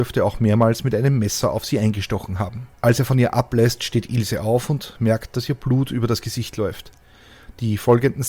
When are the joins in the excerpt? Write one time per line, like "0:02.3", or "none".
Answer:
0:02.7